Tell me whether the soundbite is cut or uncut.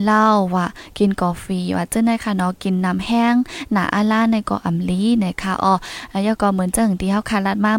uncut